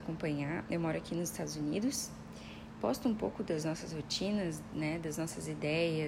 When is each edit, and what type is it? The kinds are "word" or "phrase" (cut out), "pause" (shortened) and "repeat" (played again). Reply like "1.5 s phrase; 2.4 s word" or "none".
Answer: none